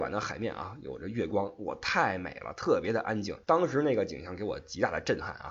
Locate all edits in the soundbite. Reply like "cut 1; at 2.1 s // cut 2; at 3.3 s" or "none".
cut 1; at 3.4 s